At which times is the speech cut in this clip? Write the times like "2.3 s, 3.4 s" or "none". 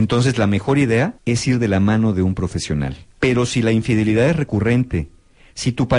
1.2 s, 3.1 s